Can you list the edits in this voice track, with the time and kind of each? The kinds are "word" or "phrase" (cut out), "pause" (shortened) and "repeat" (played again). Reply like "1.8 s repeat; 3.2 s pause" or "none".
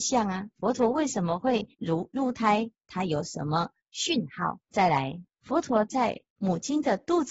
1.7 s pause; 4.6 s pause; 5.3 s pause; 6.3 s pause